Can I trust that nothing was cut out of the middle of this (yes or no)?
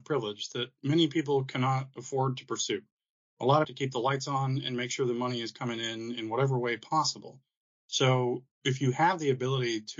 no